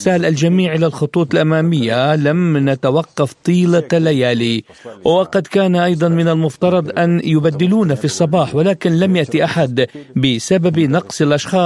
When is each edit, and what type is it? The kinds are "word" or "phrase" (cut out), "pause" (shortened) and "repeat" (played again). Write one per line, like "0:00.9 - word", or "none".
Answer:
none